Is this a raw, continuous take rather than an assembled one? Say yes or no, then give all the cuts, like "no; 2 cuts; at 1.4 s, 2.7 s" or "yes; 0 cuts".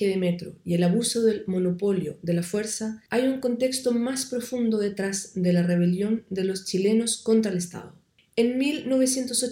yes; 0 cuts